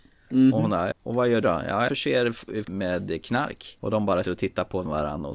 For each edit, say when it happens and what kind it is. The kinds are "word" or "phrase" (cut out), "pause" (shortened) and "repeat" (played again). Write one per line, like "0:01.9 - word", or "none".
0:00.9 - word
0:01.4 - word
0:01.9 - word
0:02.6 - word
0:04.2 - word

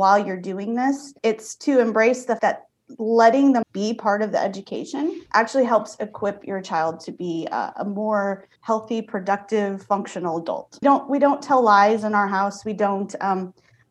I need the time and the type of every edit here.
0:01.2 - pause
0:02.4 - word
0:03.6 - phrase
0:05.3 - pause
0:08.6 - pause
0:10.8 - phrase

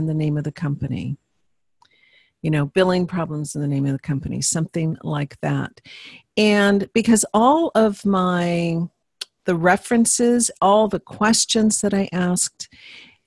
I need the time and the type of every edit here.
none

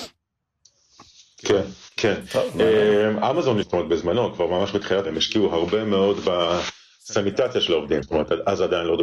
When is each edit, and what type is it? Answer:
0:03.6 - word
0:05.0 - word
0:08.0 - word

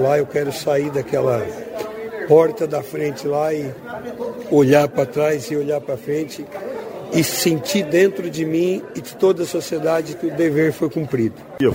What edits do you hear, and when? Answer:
none

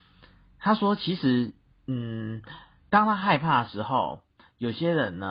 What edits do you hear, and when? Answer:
none

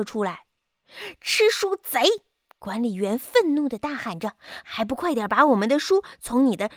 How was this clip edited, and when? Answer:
0:02.5 - pause

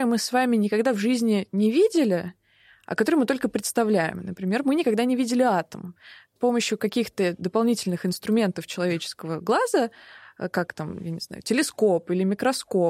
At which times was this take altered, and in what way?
0:06.4 - word

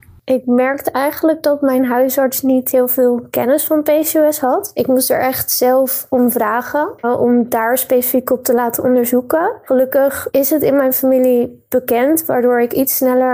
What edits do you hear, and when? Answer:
0:07.0 - pause

